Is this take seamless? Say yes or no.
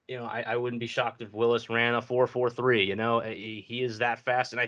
yes